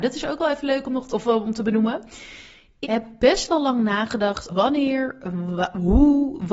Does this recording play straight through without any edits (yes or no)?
no